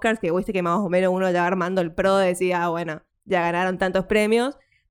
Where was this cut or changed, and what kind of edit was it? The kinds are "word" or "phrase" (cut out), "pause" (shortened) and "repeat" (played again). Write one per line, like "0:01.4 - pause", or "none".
0:03.1 - pause